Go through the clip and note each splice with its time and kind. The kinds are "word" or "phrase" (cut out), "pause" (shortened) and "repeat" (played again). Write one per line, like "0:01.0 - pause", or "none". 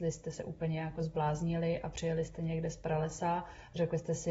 none